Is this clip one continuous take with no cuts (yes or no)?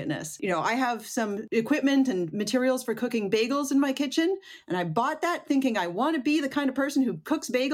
yes